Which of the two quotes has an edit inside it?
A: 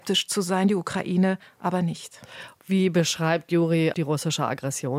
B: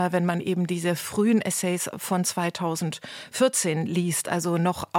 A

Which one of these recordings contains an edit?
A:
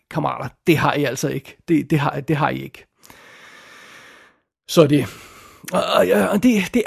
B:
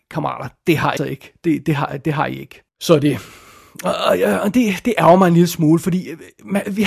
B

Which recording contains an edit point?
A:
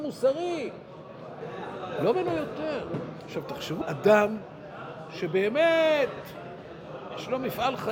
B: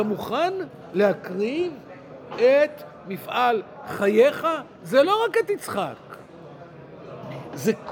A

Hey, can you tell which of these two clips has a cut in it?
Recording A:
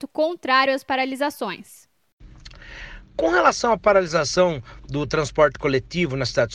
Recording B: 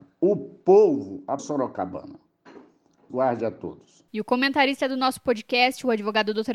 B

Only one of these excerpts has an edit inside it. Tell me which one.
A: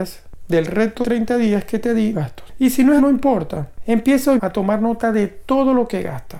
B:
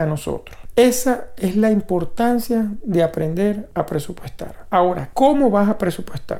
A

